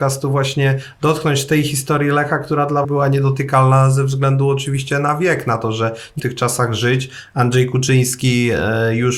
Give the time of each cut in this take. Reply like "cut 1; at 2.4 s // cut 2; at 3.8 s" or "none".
cut 1; at 2.8 s // cut 2; at 6.2 s